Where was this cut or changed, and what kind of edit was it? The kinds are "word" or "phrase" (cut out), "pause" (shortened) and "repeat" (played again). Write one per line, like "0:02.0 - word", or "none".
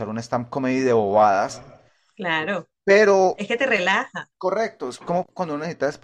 none